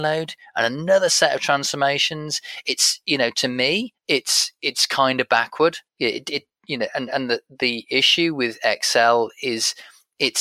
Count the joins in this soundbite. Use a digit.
2